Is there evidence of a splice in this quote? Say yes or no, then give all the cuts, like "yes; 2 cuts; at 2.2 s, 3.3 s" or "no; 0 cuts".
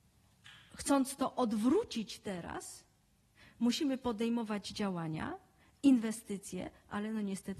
no; 0 cuts